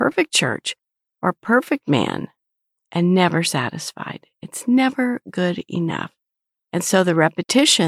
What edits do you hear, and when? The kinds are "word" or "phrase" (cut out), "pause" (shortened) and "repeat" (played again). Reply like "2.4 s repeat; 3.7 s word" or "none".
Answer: none